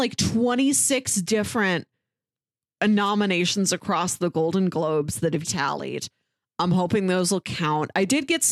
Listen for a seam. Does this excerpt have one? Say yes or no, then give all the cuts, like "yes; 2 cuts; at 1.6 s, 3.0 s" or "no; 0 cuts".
yes; 1 cut; at 5.4 s